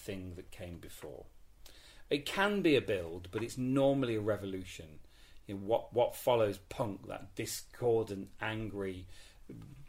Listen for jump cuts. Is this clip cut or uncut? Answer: uncut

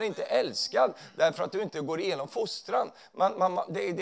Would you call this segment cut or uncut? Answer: uncut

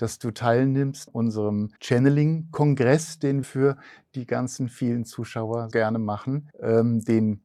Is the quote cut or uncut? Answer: cut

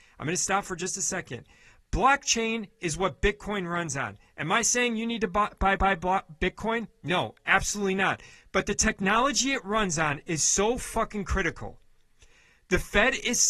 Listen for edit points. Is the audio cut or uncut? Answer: cut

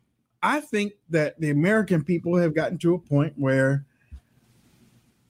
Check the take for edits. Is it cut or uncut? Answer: uncut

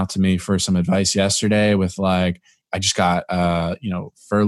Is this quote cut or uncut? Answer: uncut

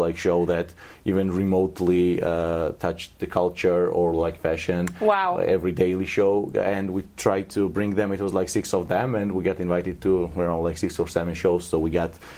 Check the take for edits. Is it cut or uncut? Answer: uncut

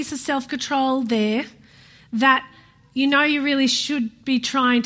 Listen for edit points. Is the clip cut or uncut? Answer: uncut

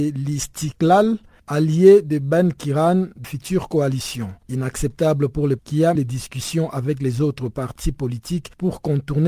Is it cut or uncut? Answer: cut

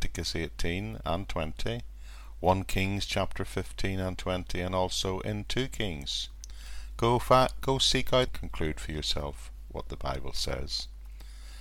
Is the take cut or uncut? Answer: cut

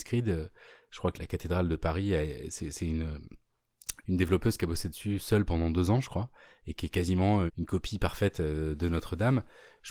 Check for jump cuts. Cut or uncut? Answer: cut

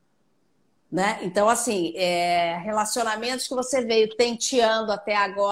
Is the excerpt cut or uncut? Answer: uncut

